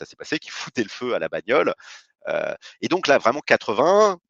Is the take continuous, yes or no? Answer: yes